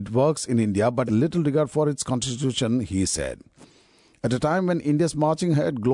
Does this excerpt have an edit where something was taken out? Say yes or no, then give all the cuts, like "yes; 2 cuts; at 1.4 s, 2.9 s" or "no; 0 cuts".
yes; 1 cut; at 1.1 s